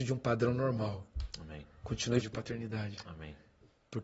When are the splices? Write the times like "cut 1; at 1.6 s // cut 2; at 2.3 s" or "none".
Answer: cut 1; at 2.2 s